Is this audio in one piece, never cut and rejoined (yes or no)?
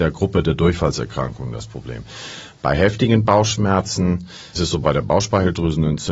no